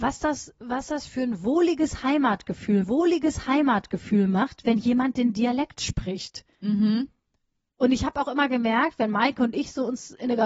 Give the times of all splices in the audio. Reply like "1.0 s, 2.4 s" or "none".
2.8 s